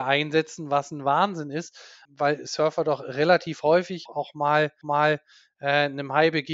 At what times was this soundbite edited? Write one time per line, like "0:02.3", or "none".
0:02.0
0:04.1
0:04.8